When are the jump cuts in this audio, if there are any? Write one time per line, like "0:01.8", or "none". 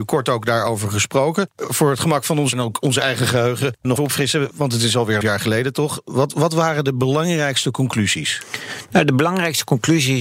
0:02.5
0:04.0
0:05.2